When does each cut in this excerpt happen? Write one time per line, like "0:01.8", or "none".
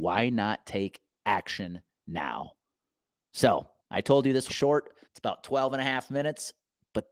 0:03.8
0:04.5
0:05.0